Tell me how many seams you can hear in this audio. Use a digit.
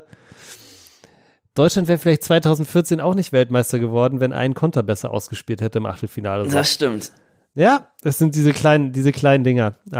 1